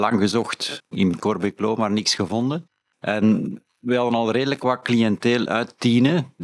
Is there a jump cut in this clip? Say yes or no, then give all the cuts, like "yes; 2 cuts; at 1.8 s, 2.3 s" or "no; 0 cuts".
no; 0 cuts